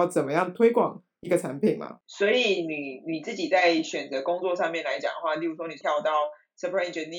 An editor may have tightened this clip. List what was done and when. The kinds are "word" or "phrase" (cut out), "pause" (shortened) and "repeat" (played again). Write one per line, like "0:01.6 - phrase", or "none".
0:05.8 - word